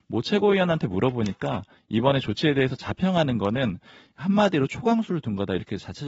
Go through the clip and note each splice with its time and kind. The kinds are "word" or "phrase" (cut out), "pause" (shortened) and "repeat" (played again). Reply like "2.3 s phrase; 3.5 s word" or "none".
none